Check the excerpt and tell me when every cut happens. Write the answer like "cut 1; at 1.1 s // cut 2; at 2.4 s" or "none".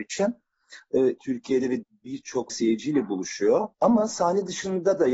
cut 1; at 1.2 s // cut 2; at 1.8 s // cut 3; at 2.5 s // cut 4; at 3.7 s